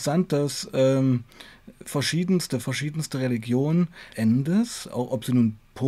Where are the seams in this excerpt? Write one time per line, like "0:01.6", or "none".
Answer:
0:02.6
0:04.1